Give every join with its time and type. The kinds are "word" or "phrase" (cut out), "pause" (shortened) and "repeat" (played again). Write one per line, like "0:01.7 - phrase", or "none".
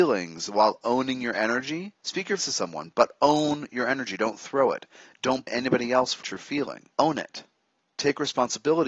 0:02.0 - pause
0:02.4 - word
0:05.5 - word
0:06.2 - word
0:06.9 - pause
0:07.7 - pause